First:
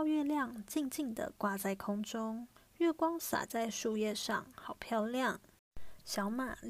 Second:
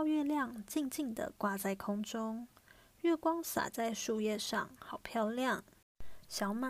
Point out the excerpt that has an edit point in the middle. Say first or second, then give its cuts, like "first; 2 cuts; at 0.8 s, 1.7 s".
first; 1 cut; at 2.6 s